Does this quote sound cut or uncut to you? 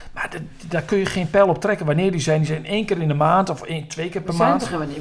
uncut